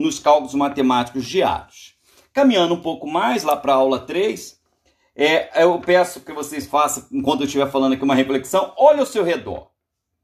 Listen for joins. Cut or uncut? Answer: uncut